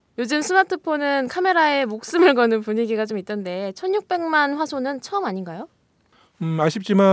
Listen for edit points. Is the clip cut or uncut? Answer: uncut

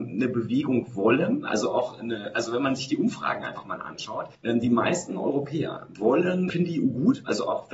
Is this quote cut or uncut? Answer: cut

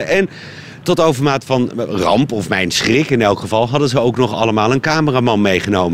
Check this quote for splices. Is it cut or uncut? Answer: uncut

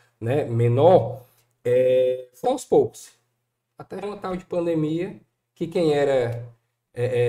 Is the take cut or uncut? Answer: cut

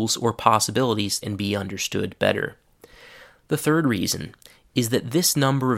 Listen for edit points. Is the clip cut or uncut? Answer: cut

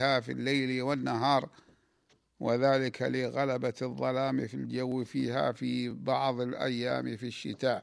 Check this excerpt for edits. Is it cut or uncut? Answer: uncut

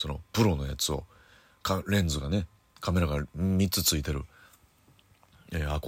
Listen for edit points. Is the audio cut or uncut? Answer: uncut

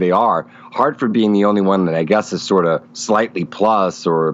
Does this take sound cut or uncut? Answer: cut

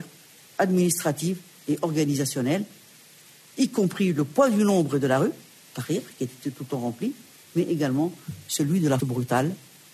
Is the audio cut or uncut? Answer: cut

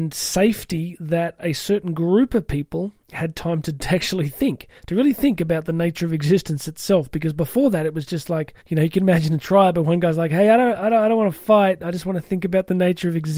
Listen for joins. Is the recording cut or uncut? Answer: cut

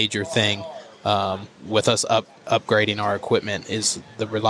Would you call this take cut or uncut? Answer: cut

